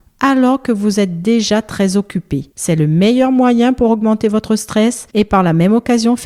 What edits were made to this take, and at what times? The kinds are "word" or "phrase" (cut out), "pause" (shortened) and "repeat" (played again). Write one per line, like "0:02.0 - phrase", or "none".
0:02.5 - pause
0:05.1 - pause